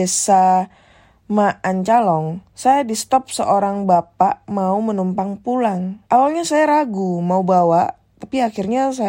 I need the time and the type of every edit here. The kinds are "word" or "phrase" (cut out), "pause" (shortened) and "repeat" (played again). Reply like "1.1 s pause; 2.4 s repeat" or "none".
2.5 s pause; 4.4 s pause; 6.0 s pause